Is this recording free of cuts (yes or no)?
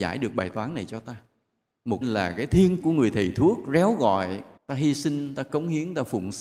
no